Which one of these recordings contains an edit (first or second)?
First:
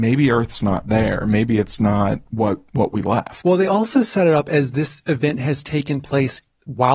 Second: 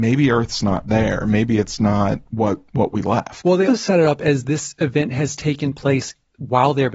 second